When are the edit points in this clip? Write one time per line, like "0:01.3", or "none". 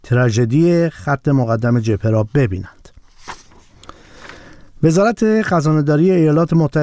none